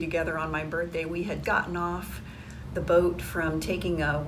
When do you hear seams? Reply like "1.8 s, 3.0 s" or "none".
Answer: 1.4 s

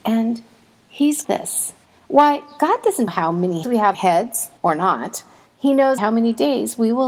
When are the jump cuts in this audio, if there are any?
1.2 s, 1.8 s, 3.1 s, 3.6 s, 3.9 s, 4.6 s, 5.5 s, 6.0 s

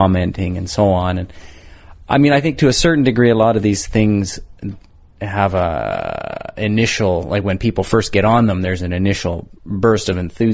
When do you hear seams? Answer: none

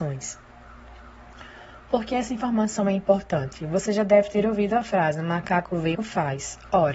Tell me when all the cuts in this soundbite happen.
6.0 s

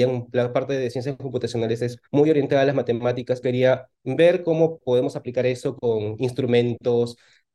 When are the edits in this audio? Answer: 2.1 s, 3.4 s

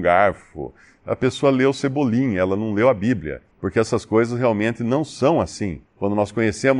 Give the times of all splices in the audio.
3.5 s, 5.9 s

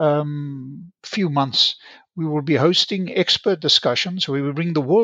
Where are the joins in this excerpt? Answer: none

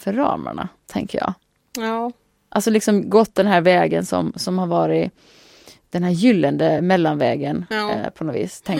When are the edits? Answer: none

